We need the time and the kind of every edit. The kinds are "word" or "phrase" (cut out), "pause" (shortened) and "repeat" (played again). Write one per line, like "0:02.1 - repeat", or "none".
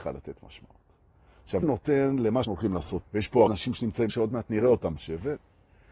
0:01.6 - word
0:02.4 - word
0:03.0 - word
0:03.5 - word
0:04.1 - word
0:05.0 - word

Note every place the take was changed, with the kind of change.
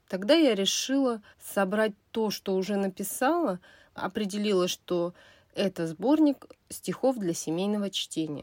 0:01.3 - pause
0:04.0 - phrase

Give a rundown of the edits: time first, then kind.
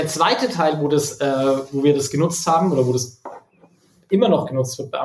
none

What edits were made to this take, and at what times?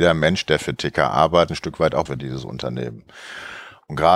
0:01.5 - word
0:02.1 - word

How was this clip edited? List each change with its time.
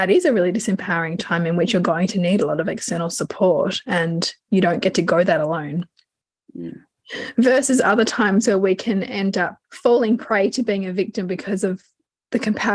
0:09.6 - pause

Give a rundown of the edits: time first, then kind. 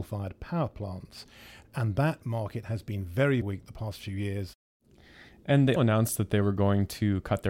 0:03.4 - word
0:05.8 - word

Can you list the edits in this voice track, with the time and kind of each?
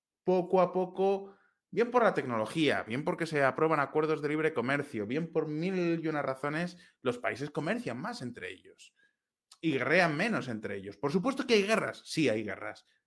none

